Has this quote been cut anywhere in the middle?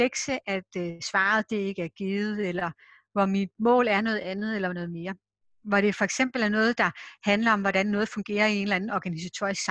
no; 0 cuts

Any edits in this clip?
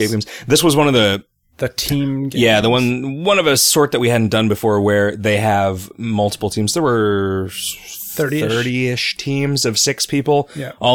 no; 0 cuts

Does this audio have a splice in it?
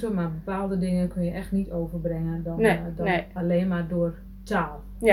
no; 0 cuts

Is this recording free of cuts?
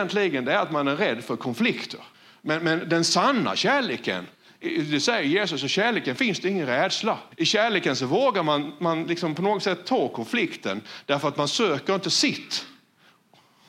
no; 2 cuts; at 2.1 s, 7.3 s

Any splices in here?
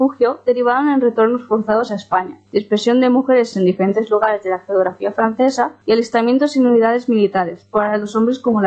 yes; 3 cuts; at 2.5 s, 3.5 s, 5.8 s

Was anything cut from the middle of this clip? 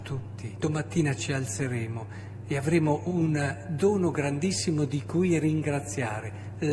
no; 0 cuts

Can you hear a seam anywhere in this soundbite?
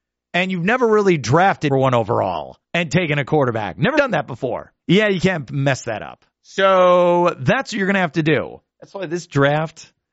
yes; 6 cuts; at 1.7 s, 2.6 s, 3.9 s, 4.8 s, 6.3 s, 8.7 s

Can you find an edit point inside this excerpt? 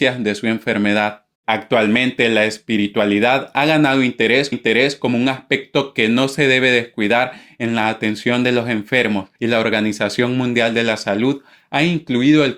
yes; 3 cuts; at 1.3 s, 4.5 s, 9.4 s

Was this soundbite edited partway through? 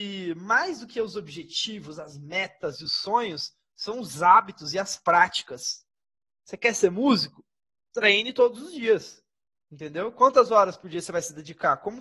no; 0 cuts

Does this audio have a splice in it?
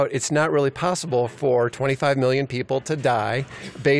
no; 0 cuts

